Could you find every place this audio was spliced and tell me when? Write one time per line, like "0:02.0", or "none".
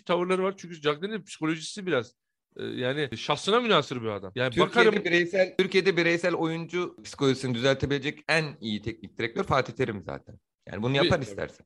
none